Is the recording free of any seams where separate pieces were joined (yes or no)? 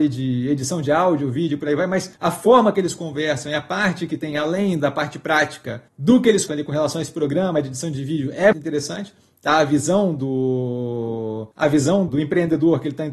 no